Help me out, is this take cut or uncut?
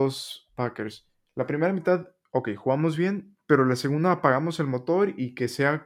uncut